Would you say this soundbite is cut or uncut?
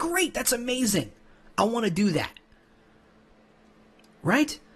uncut